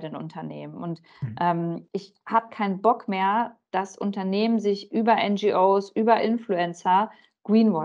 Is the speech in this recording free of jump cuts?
no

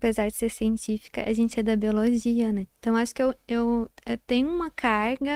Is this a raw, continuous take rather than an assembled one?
yes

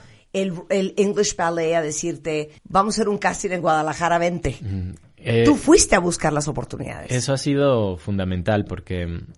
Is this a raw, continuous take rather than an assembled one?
no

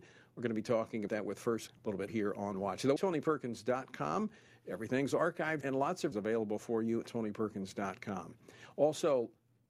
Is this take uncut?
no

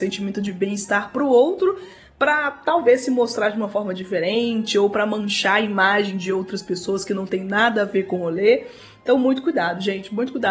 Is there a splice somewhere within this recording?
no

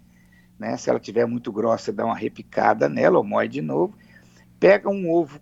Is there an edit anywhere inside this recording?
no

